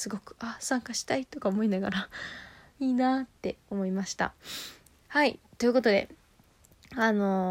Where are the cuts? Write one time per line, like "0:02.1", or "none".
none